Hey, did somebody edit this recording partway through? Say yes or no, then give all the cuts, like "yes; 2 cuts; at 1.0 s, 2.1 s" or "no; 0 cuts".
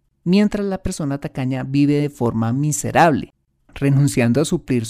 no; 0 cuts